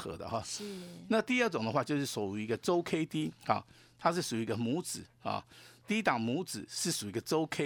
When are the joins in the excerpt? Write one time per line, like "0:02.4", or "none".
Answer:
0:03.4